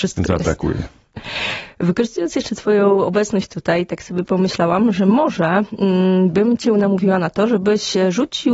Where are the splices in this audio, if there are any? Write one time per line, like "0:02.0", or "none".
none

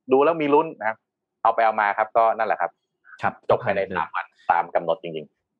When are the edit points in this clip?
none

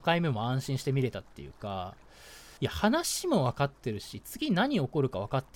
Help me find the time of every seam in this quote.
0:02.6

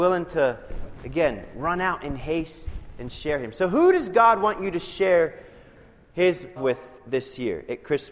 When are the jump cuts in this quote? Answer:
0:06.6

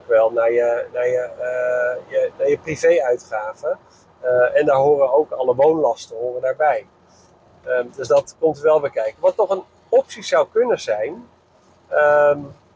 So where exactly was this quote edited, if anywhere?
none

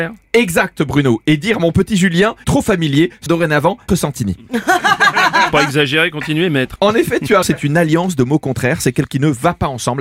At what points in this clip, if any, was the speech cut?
0:02.4
0:03.3
0:03.9
0:06.8
0:07.4
0:09.1

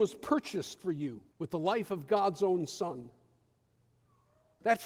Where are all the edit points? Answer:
0:01.3

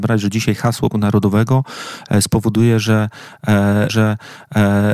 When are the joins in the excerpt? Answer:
0:00.9
0:03.9

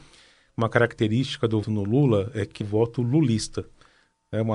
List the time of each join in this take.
0:01.6
0:02.6

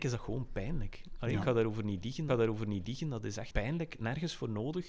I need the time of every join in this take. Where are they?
0:02.3
0:03.5

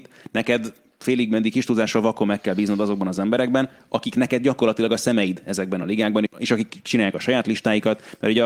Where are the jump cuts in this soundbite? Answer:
0:06.3

